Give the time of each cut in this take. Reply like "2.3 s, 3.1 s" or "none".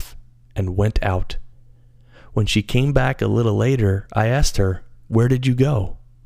none